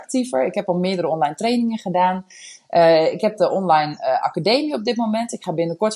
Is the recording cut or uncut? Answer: uncut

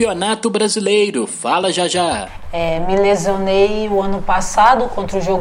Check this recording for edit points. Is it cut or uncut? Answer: uncut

